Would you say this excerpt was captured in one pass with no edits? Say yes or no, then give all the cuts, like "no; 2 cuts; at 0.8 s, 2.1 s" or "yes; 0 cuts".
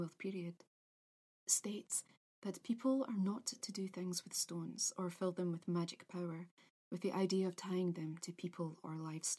yes; 0 cuts